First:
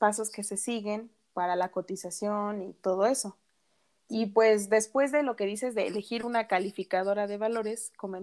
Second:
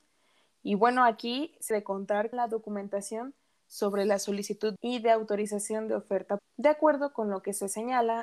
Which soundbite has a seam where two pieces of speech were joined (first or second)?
second